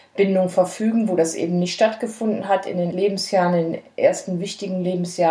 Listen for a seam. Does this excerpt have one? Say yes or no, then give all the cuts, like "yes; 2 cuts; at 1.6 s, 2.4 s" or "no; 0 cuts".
yes; 1 cut; at 2.9 s